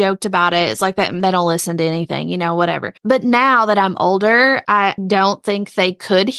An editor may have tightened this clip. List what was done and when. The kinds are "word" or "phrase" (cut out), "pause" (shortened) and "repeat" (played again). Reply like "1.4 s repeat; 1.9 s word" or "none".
3.0 s pause; 5.0 s word